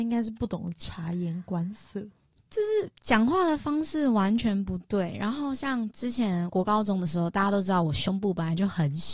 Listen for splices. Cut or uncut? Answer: uncut